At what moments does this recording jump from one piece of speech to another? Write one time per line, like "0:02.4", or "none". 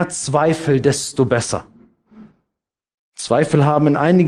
none